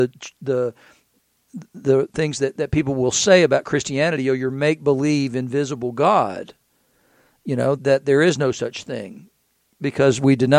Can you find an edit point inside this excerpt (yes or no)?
yes